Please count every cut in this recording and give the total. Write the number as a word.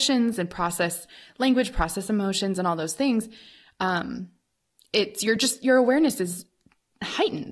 zero